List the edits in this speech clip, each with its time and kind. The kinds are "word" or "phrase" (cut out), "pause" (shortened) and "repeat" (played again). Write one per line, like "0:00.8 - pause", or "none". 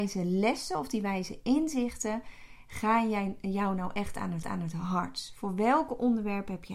0:04.4 - repeat